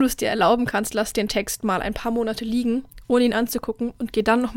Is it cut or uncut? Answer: uncut